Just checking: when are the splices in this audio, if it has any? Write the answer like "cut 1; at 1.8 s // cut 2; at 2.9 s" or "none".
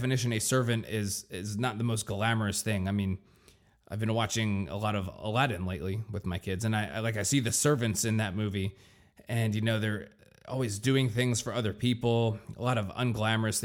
none